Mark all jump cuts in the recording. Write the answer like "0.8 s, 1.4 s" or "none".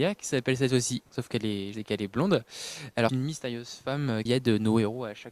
1.1 s, 1.7 s, 3.1 s, 4.3 s